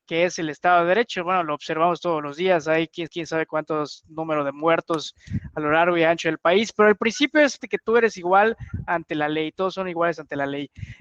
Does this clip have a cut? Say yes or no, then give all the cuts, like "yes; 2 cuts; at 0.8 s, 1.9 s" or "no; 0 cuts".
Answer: yes; 2 cuts; at 3.1 s, 7.6 s